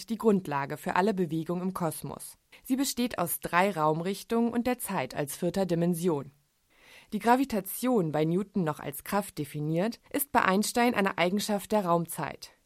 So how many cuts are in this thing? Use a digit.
2